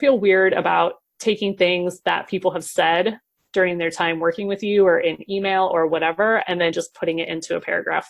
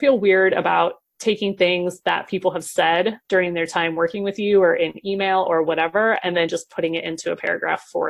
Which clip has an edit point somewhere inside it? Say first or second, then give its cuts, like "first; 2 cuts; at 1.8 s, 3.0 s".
second; 1 cut; at 3.2 s